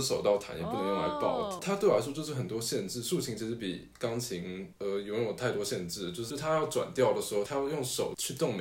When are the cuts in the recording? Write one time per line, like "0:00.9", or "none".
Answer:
none